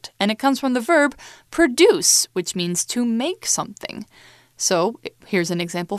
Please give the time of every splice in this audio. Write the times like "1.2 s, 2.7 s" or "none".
none